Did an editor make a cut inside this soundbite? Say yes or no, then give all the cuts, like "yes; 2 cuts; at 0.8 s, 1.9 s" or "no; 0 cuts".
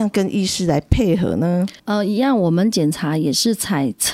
yes; 1 cut; at 1.8 s